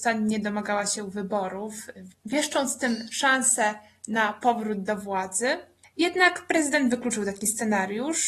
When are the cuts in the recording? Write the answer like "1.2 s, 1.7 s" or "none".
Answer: none